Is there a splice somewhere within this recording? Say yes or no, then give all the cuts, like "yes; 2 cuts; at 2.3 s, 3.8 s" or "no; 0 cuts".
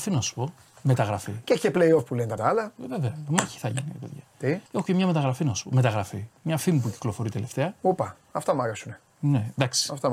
yes; 2 cuts; at 2.4 s, 4.7 s